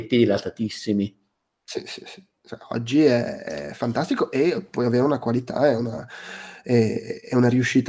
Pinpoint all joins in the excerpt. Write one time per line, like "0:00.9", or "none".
none

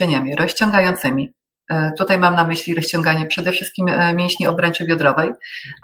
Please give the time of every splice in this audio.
none

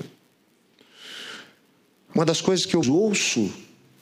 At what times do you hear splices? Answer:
0:02.8

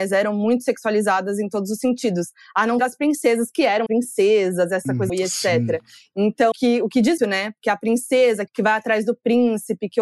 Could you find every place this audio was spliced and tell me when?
0:02.8
0:03.9
0:05.1
0:06.5
0:07.2
0:08.5

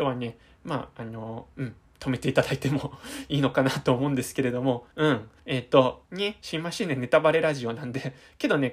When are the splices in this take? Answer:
0:01.5
0:04.9
0:05.4
0:06.1

